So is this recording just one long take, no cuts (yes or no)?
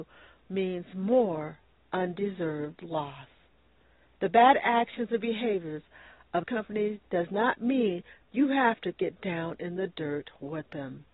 no